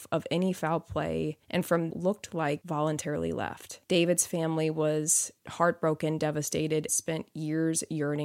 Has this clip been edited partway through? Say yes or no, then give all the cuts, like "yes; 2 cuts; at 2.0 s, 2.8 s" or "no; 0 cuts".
yes; 6 cuts; at 1.4 s, 1.9 s, 2.6 s, 3.8 s, 5.4 s, 6.9 s